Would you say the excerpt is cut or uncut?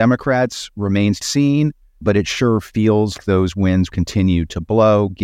cut